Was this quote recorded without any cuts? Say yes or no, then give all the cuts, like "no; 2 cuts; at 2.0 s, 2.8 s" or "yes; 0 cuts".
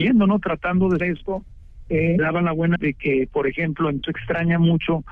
no; 4 cuts; at 1.0 s, 2.2 s, 2.8 s, 4.0 s